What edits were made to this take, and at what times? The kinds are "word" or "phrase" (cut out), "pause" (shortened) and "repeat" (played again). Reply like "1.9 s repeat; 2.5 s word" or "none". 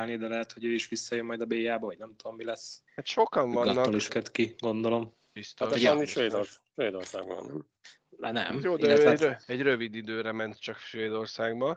2.9 s pause; 4.1 s phrase; 9.4 s pause

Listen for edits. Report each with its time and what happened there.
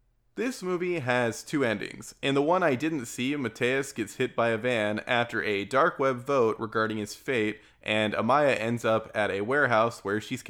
none

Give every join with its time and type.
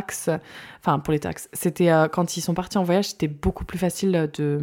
none

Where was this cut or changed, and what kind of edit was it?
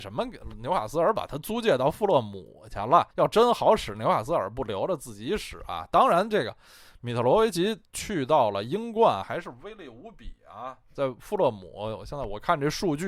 3.1 s pause

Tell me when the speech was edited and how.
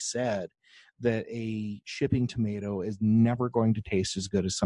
none

